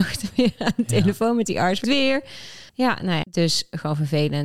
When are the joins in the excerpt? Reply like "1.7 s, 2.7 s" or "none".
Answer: 1.8 s, 2.7 s, 3.2 s